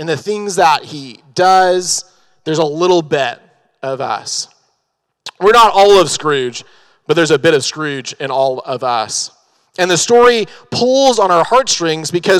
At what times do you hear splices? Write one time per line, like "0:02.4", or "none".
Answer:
none